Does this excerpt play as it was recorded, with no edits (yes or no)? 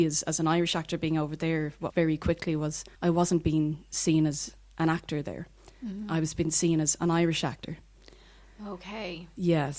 no